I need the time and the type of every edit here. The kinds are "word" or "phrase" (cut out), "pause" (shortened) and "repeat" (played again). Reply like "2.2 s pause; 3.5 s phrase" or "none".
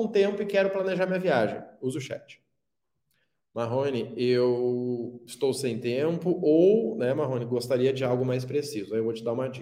none